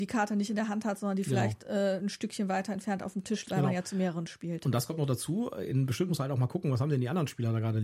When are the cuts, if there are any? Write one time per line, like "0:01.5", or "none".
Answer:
0:03.5
0:06.1

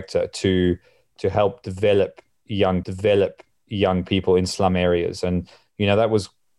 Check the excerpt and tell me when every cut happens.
0:02.8

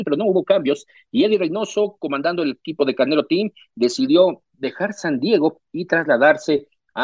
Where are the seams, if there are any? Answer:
none

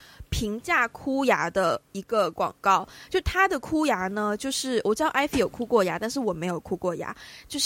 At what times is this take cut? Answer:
0:01.8

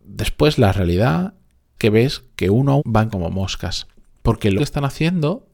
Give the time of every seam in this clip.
0:01.8
0:02.8
0:03.1
0:04.6

